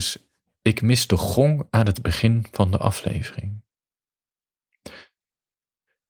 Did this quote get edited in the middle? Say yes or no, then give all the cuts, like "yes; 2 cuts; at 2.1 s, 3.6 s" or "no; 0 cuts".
no; 0 cuts